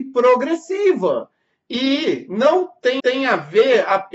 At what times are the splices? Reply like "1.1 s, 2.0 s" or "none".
3.0 s

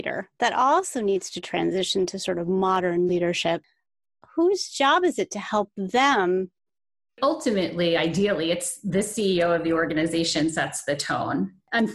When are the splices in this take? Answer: none

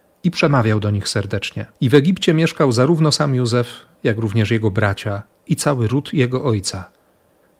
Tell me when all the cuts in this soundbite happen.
1.7 s

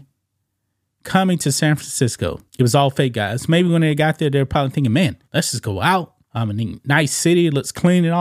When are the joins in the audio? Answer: 2.5 s, 5.2 s, 6.2 s

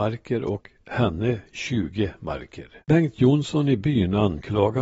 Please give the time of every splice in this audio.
2.8 s

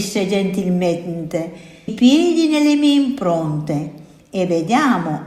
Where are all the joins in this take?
1.9 s

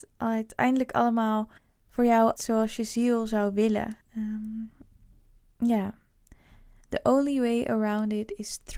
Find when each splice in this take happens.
1.6 s, 2.4 s, 4.0 s

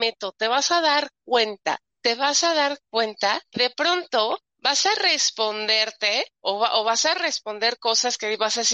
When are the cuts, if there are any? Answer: 3.5 s

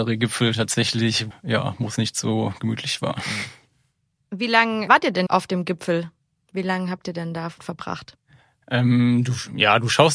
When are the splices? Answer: 1.3 s, 4.9 s, 5.3 s, 7.6 s

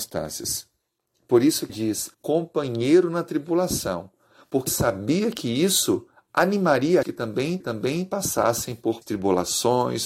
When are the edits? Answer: 1.7 s, 2.1 s, 4.7 s, 7.0 s, 7.6 s, 9.0 s

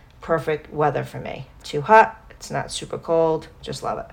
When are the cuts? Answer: 1.6 s

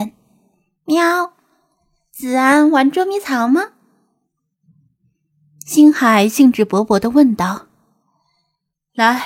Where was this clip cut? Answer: none

